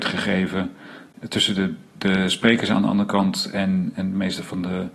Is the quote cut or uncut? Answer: uncut